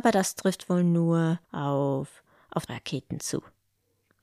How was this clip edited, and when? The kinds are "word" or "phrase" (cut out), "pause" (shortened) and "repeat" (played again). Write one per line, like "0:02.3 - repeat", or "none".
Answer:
0:01.4 - pause
0:02.7 - phrase